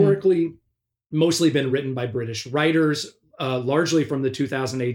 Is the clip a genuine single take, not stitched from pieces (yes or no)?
yes